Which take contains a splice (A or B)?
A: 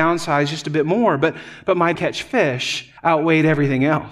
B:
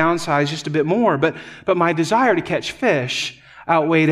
A